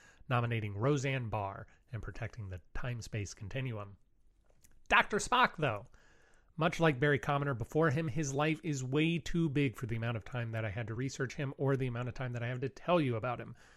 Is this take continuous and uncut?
yes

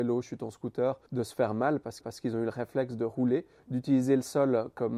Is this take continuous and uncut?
no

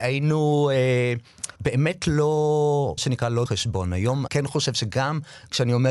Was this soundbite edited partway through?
yes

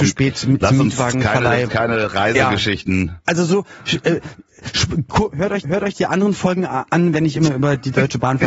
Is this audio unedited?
no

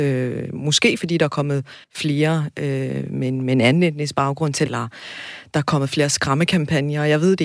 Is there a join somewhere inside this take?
yes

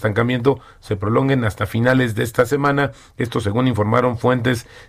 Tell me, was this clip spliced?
no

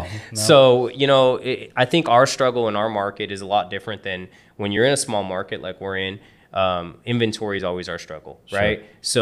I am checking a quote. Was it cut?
no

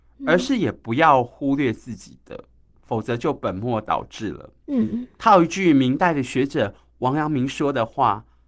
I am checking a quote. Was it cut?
no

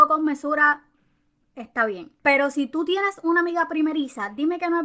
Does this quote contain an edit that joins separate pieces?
yes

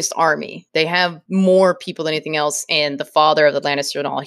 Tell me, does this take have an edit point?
no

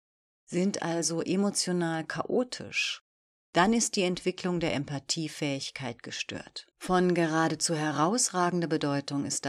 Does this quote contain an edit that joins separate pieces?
yes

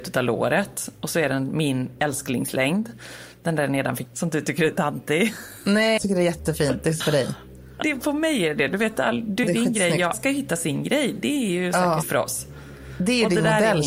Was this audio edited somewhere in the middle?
yes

